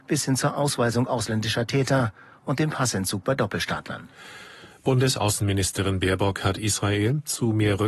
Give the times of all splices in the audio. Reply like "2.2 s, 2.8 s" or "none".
none